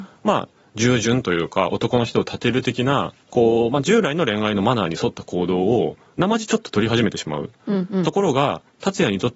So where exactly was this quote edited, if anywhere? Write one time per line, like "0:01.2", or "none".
0:03.2